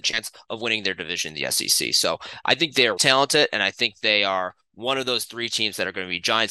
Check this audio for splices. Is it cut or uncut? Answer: cut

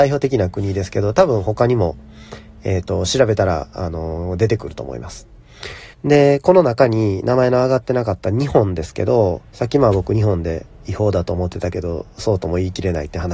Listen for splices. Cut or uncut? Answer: cut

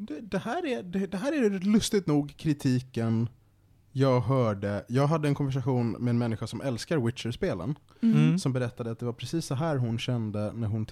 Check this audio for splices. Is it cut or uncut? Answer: uncut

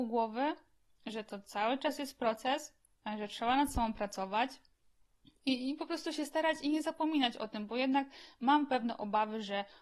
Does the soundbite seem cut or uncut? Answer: uncut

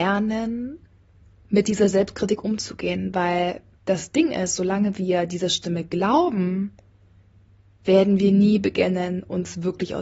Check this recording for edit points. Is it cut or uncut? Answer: uncut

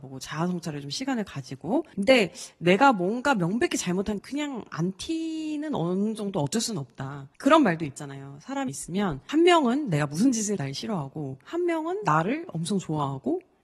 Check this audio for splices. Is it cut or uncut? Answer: cut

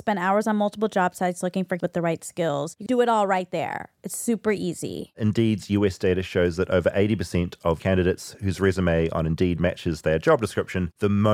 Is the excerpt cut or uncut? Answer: cut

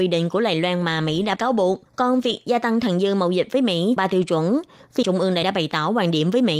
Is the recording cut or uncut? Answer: cut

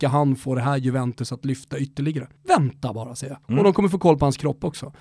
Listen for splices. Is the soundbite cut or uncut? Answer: cut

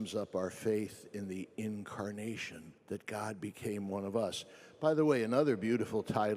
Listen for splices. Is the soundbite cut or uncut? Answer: cut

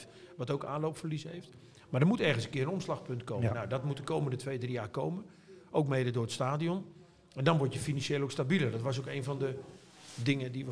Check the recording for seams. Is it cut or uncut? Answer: uncut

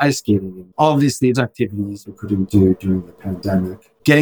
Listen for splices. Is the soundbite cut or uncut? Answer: cut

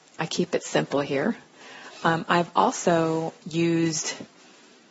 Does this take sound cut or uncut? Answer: cut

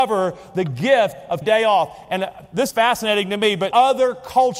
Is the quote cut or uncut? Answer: cut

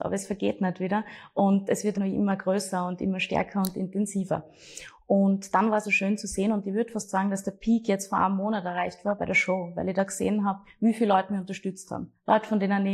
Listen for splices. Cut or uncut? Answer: cut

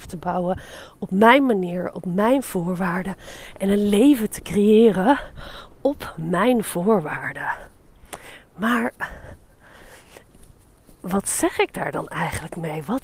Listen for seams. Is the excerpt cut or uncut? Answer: uncut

